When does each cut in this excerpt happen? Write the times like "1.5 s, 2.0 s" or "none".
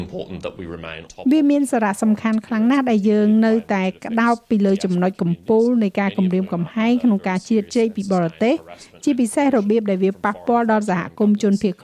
1.1 s